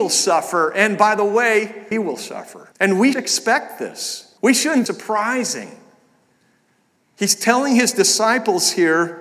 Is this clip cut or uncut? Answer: cut